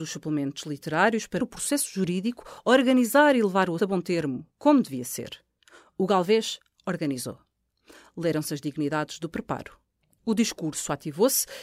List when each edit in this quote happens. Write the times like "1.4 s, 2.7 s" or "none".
1.4 s, 3.8 s

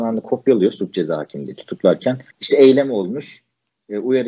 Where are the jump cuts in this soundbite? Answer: 2.3 s

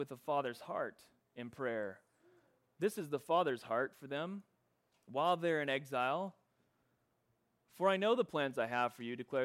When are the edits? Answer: none

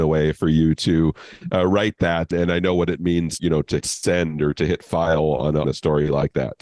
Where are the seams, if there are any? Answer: 2.3 s, 3.4 s, 3.8 s, 5.6 s

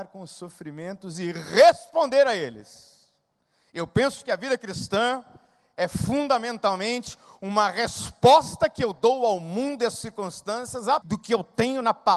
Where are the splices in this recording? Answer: 3.4 s, 11.0 s

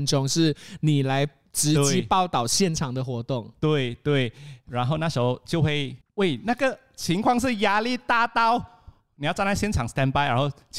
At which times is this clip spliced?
6.0 s

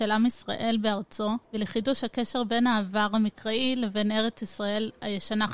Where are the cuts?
1.4 s

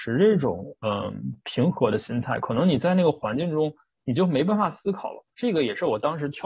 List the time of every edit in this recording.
5.3 s

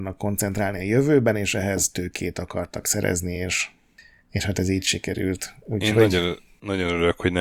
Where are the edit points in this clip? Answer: none

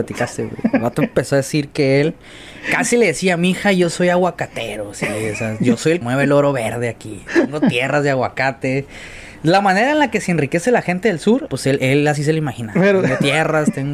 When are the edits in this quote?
6.0 s, 11.5 s

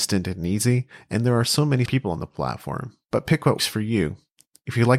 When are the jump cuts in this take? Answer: 1.9 s, 3.6 s

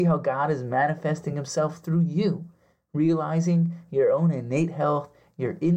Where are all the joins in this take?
none

